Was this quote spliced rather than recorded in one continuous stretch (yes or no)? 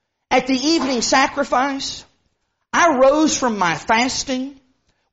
no